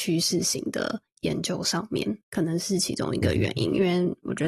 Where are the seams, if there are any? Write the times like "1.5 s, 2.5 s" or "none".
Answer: 2.2 s

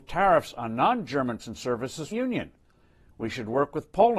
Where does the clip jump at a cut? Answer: 1.4 s, 2.1 s

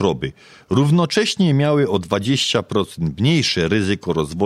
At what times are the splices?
none

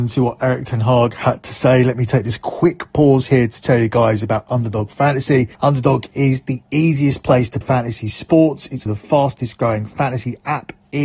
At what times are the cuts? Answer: 5.5 s, 7.6 s, 8.9 s

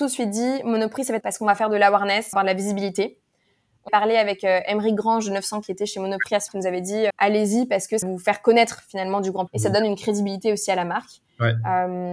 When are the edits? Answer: 1.2 s, 2.3 s, 3.9 s, 5.6 s, 6.5 s, 7.1 s, 8.0 s, 9.5 s

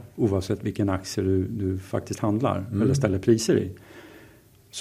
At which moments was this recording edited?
none

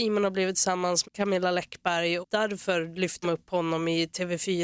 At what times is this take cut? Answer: 1.0 s, 2.2 s, 3.2 s

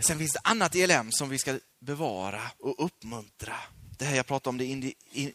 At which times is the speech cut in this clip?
1.7 s

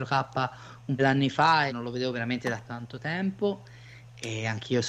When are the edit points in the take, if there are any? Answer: 1.0 s, 1.7 s, 2.7 s

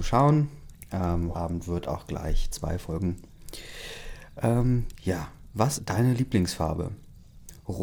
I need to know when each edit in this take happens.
1.3 s, 2.5 s, 5.8 s

